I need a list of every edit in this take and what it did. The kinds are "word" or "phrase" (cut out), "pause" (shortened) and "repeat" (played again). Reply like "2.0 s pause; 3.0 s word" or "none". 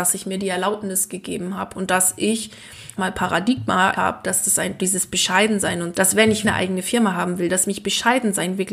3.0 s phrase; 3.9 s word; 5.9 s word; 6.4 s word